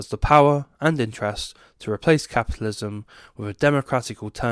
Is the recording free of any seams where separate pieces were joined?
yes; 0 cuts

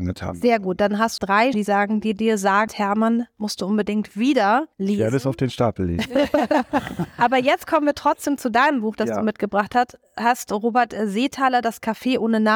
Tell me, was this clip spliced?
yes; 4 cuts; at 1.2 s, 1.5 s, 2.7 s, 4.7 s

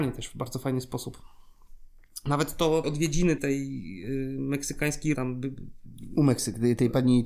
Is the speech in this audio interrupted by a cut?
yes; 3 cuts; at 2.8 s, 3.4 s, 5.1 s

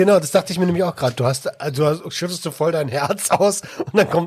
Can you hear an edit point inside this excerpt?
no; 0 cuts

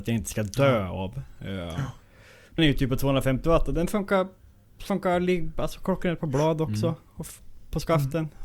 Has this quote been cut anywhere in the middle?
yes; 1 cut; at 2.6 s

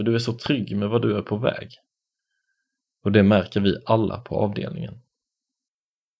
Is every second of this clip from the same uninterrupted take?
yes; 0 cuts

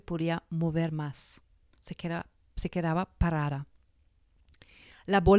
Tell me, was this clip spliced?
no; 0 cuts

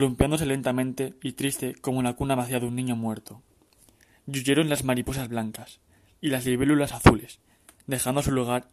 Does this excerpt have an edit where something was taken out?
no; 0 cuts

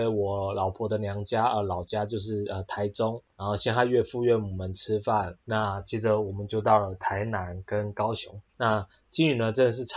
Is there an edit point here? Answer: yes; 3 cuts; at 3.3 s, 5.4 s, 8.5 s

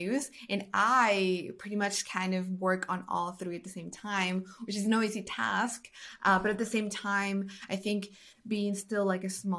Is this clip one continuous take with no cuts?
yes; 0 cuts

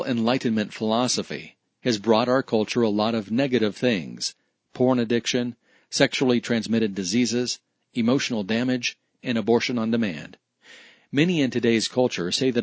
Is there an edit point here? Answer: no; 0 cuts

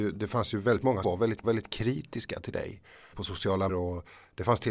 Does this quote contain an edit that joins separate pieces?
yes; 4 cuts; at 1.0 s, 1.4 s, 3.1 s, 3.7 s

